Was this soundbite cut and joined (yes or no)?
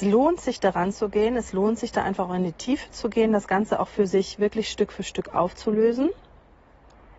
no